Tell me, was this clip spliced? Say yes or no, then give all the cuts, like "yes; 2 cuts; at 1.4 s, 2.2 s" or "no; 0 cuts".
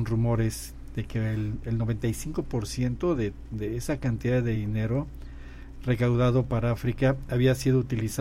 no; 0 cuts